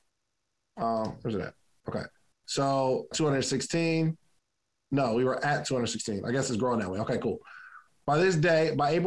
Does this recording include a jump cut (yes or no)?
yes